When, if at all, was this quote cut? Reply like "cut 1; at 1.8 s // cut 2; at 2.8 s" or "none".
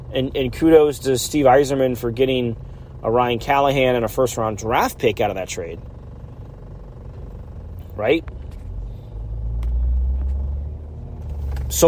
none